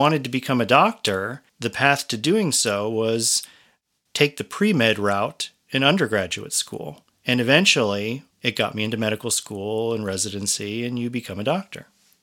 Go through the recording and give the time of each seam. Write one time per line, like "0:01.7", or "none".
0:01.5
0:08.3